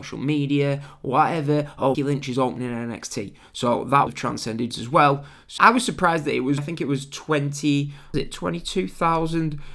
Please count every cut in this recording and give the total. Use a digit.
6